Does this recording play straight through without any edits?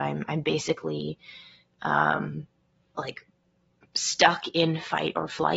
yes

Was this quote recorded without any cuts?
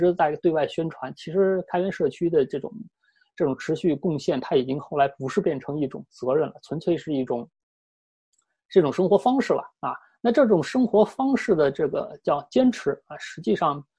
yes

